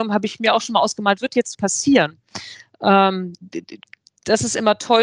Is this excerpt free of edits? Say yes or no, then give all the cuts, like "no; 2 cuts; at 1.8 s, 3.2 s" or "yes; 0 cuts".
no; 2 cuts; at 1.2 s, 1.5 s